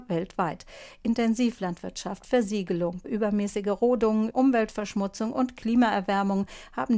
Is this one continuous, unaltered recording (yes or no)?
no